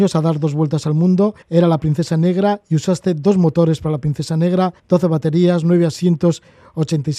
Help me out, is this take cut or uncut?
cut